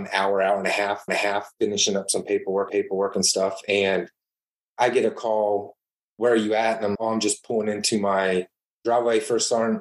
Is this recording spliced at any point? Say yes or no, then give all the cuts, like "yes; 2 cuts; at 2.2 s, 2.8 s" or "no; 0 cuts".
yes; 3 cuts; at 1.1 s, 2.7 s, 7.0 s